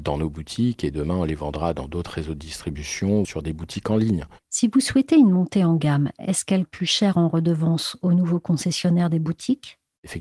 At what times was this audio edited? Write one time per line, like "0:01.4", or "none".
0:03.2
0:06.7